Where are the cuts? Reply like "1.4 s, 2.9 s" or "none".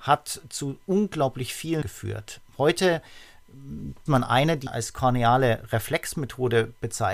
1.8 s, 4.1 s, 4.7 s